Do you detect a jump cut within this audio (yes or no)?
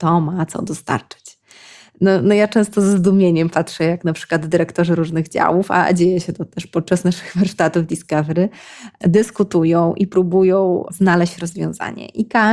no